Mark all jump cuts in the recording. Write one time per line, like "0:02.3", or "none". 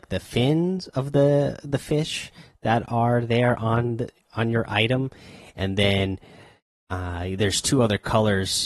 none